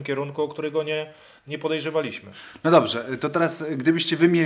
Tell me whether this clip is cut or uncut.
uncut